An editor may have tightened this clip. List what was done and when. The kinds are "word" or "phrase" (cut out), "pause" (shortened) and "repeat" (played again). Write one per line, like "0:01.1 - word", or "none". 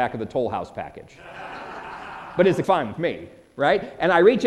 0:02.6 - phrase